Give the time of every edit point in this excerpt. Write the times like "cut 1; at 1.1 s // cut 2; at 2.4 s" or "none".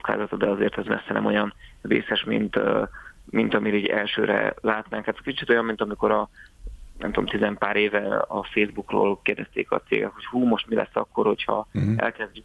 none